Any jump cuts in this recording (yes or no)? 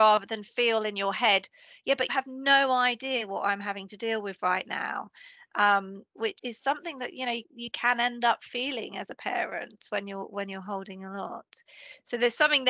yes